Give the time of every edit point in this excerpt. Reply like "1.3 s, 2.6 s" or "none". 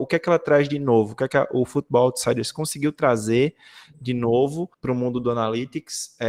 4.7 s